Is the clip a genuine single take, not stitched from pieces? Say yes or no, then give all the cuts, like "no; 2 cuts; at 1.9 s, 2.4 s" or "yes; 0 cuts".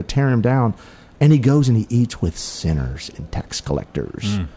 yes; 0 cuts